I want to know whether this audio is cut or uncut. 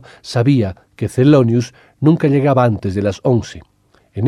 uncut